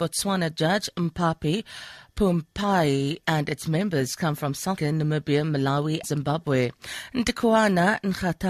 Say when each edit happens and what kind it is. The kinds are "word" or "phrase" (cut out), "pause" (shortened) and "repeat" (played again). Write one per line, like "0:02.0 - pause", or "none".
0:04.8 - word
0:06.0 - word

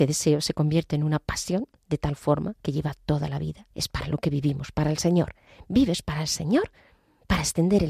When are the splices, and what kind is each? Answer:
0:02.6 - pause
0:03.7 - pause

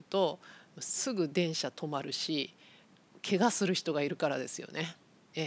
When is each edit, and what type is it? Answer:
none

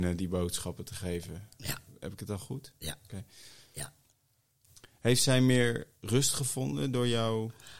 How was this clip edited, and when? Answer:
none

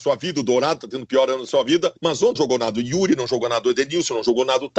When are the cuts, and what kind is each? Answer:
0:02.0 - pause
0:02.4 - word

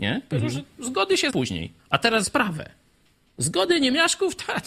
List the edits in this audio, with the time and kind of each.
0:01.3 - word
0:01.8 - pause
0:02.2 - word

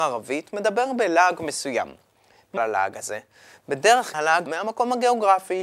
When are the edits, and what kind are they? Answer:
0:02.6 - word
0:04.1 - word
0:04.5 - word

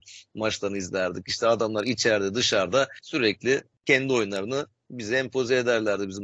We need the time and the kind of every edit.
none

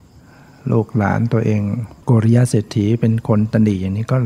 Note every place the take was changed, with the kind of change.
0:02.0 - pause

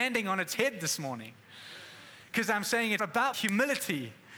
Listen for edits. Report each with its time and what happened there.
0:03.0 - word
0:03.3 - phrase

